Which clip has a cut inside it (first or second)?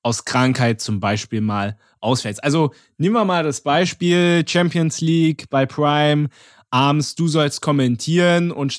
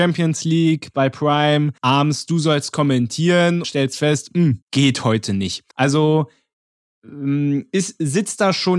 second